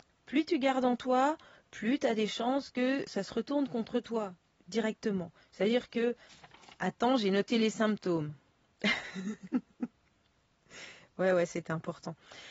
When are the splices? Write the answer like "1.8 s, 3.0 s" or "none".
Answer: 3.1 s